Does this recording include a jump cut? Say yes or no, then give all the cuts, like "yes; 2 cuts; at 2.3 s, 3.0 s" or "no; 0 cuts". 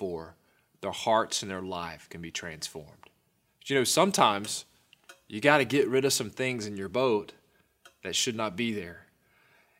no; 0 cuts